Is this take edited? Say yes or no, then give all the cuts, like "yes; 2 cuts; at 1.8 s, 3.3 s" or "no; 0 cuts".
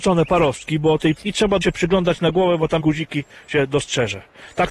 yes; 3 cuts; at 1.2 s, 1.6 s, 2.8 s